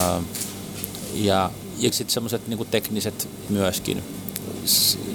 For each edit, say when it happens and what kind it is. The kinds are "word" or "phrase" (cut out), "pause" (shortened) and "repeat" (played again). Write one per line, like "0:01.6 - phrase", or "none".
0:01.9 - phrase
0:03.5 - word